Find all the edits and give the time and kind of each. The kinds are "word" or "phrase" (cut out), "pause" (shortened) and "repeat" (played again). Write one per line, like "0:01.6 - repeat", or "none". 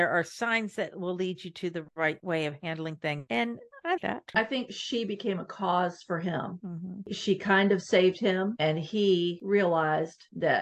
0:04.0 - word